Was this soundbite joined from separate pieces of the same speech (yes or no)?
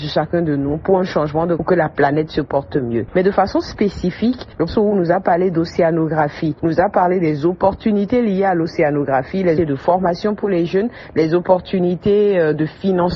yes